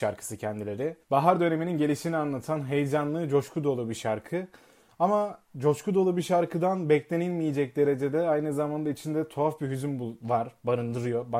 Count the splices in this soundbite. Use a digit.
2